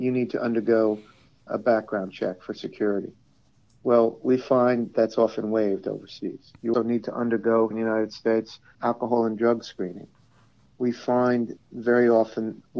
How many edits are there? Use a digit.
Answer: 6